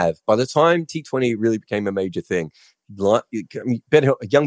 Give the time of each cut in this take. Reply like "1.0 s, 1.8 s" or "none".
none

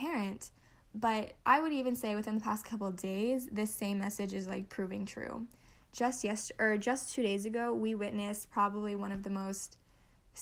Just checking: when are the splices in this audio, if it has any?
1.4 s

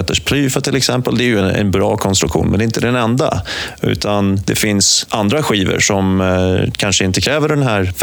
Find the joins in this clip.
none

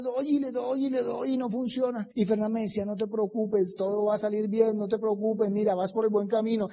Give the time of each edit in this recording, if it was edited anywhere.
2.1 s

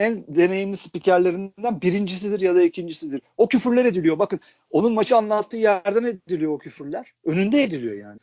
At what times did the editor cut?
none

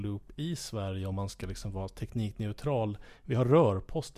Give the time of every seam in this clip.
none

